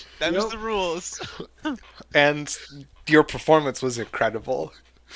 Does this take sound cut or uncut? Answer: uncut